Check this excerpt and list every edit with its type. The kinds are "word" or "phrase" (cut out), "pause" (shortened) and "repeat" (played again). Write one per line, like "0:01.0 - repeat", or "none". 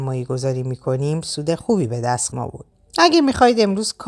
0:02.3 - word
0:02.7 - pause